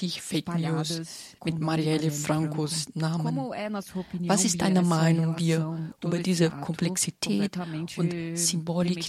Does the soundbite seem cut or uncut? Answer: uncut